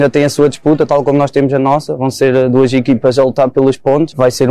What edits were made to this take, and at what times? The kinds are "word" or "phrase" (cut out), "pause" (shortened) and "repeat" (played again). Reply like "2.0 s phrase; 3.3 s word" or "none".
none